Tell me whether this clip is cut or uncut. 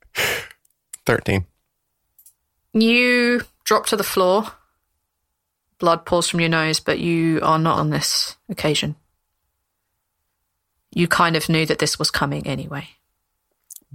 cut